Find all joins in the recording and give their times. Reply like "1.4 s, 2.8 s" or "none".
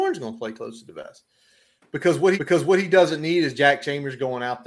2.4 s